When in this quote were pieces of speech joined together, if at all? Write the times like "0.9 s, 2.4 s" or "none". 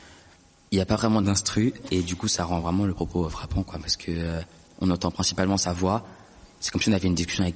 none